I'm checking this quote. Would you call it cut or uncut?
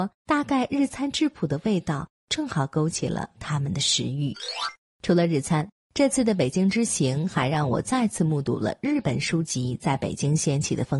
uncut